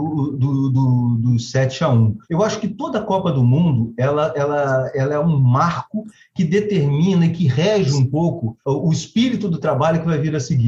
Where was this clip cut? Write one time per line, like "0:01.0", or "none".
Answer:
0:02.2
0:08.6